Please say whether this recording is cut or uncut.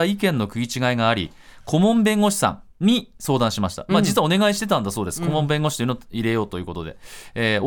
cut